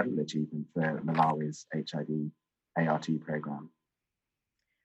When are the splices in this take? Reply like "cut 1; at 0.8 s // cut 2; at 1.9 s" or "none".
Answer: none